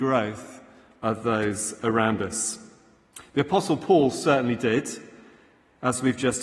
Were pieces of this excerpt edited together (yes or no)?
no